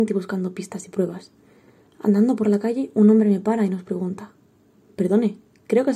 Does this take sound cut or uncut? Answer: uncut